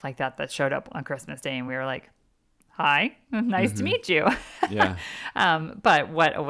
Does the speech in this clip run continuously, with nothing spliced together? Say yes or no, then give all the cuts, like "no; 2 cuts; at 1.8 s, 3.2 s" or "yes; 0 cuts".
yes; 0 cuts